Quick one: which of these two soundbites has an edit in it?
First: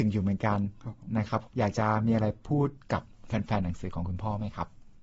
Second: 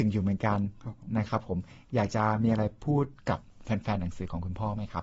first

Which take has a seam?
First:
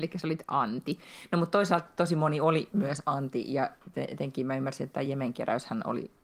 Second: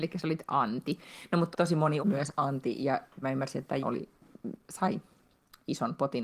second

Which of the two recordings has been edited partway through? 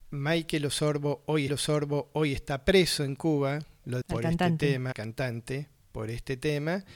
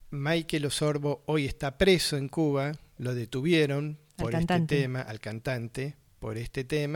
first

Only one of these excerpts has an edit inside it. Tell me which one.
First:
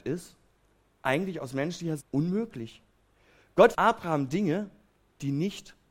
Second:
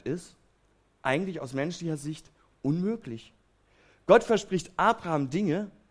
first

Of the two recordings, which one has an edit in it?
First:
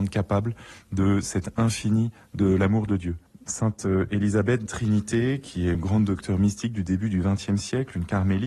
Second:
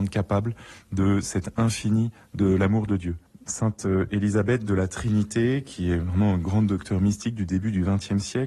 first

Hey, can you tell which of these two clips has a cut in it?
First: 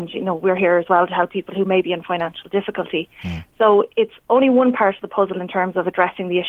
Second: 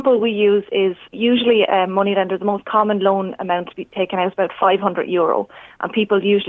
second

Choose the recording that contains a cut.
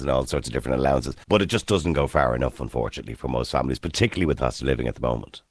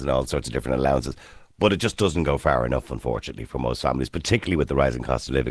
first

